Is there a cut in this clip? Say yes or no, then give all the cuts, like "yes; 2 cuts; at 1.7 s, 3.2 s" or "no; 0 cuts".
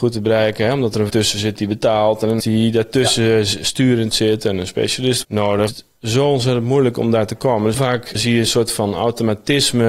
yes; 6 cuts; at 1.1 s, 2.4 s, 5.2 s, 5.7 s, 7.7 s, 8.2 s